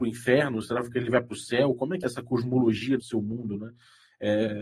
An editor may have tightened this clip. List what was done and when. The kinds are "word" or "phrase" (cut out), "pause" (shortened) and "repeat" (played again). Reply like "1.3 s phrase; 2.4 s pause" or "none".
2.0 s word; 3.0 s word